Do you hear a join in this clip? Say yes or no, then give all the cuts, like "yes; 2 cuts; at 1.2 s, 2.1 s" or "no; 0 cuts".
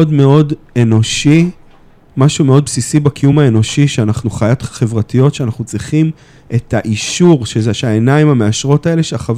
no; 0 cuts